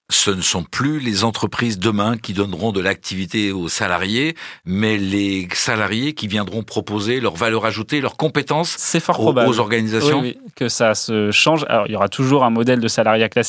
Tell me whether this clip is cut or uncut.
uncut